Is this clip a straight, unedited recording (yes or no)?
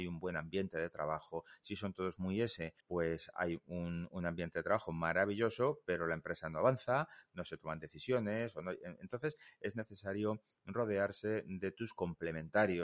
no